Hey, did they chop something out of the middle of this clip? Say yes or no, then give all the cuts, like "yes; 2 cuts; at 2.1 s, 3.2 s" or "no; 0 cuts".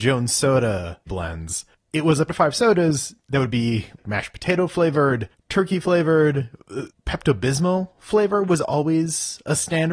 yes; 2 cuts; at 1.1 s, 2.3 s